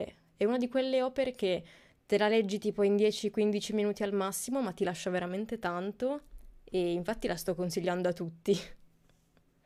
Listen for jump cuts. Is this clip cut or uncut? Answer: uncut